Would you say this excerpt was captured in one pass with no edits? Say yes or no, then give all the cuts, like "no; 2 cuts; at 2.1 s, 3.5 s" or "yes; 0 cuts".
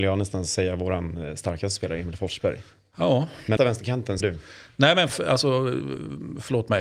no; 3 cuts; at 3.6 s, 4.2 s, 5.1 s